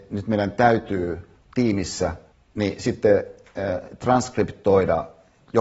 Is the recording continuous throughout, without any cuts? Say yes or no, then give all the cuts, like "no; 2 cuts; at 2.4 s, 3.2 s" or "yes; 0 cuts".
no; 1 cut; at 2.3 s